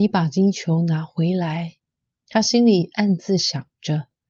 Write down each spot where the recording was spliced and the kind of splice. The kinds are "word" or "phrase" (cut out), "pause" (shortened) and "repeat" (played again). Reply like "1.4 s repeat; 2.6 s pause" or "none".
1.8 s pause